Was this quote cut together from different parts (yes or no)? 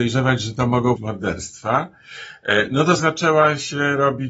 yes